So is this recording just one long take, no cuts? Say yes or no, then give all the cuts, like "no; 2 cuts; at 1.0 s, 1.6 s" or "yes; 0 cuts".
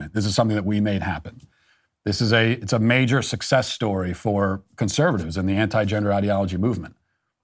yes; 0 cuts